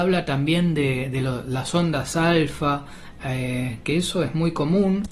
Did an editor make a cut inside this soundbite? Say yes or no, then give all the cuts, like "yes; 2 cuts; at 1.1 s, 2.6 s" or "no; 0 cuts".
no; 0 cuts